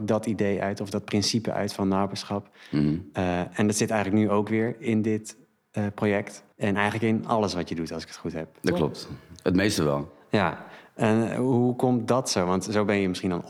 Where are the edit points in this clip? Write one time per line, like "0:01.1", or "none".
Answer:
0:06.5